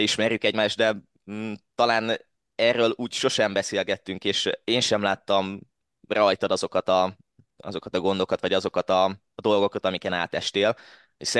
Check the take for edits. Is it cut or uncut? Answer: uncut